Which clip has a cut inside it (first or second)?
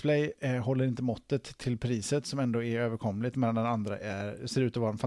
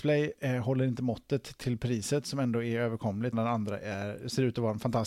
second